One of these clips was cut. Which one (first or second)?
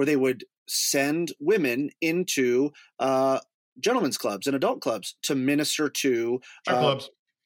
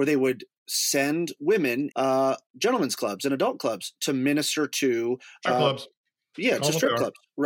second